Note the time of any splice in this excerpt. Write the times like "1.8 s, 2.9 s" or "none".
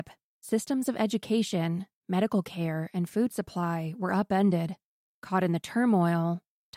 none